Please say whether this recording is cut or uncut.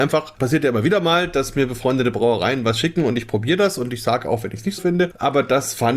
cut